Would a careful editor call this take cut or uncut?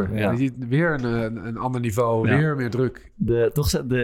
uncut